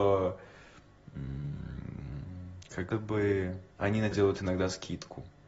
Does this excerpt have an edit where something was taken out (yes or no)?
yes